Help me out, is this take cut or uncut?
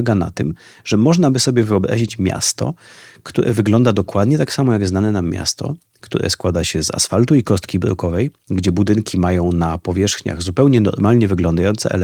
uncut